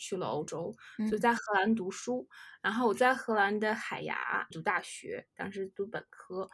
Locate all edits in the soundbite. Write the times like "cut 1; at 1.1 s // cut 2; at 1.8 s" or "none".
cut 1; at 4.5 s

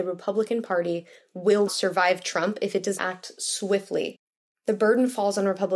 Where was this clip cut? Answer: cut 1; at 1.7 s // cut 2; at 3.0 s

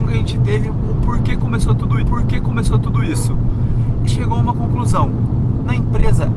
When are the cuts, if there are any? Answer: cut 1; at 2.0 s // cut 2; at 4.1 s

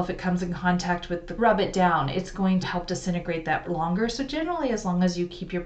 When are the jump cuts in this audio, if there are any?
cut 1; at 1.4 s // cut 2; at 2.6 s // cut 3; at 3.6 s

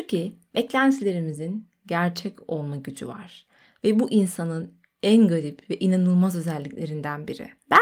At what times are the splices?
none

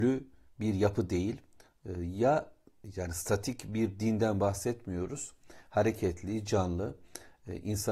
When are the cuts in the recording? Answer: none

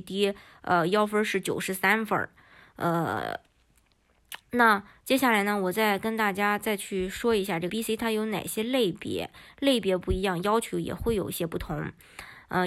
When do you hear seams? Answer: cut 1; at 4.4 s // cut 2; at 7.7 s

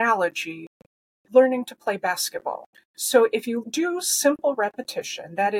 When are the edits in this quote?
cut 1; at 2.7 s // cut 2; at 3.6 s

